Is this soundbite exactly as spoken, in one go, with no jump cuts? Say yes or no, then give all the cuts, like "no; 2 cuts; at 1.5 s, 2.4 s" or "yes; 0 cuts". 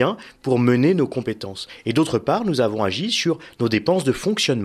yes; 0 cuts